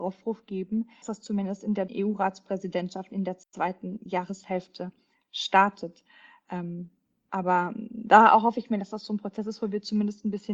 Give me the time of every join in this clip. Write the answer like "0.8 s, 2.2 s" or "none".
1.0 s, 1.9 s, 3.4 s